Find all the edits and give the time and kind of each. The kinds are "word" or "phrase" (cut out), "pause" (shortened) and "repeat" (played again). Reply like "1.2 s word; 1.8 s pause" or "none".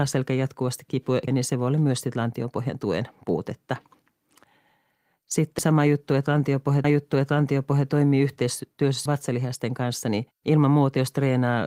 1.3 s word; 5.6 s word; 6.8 s repeat; 9.1 s word; 10.3 s pause